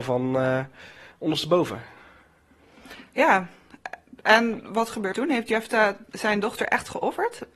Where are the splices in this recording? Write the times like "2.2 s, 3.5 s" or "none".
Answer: 5.1 s